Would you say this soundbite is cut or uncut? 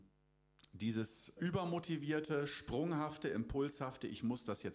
cut